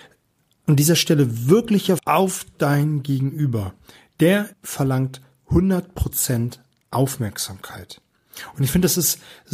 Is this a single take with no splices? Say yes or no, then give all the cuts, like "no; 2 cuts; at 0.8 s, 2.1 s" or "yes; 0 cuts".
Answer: no; 2 cuts; at 2.0 s, 4.5 s